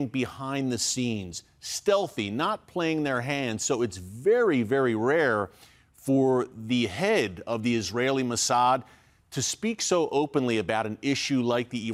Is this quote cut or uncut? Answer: uncut